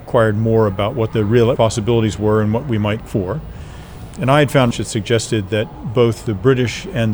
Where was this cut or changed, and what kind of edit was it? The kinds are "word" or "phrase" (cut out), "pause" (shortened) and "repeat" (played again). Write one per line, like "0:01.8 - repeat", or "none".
0:01.1 - word
0:01.6 - word
0:03.0 - word
0:04.7 - word